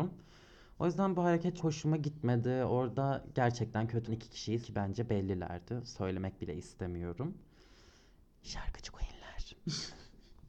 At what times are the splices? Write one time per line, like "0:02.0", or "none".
0:01.6
0:04.1
0:04.6